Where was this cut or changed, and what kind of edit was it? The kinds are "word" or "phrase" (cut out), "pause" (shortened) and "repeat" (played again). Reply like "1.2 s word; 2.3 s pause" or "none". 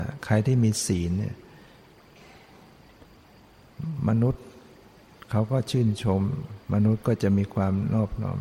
6.6 s pause